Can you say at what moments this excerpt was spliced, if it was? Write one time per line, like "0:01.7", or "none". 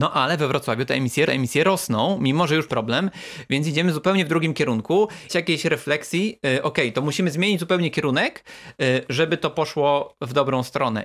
0:01.3
0:02.7
0:05.3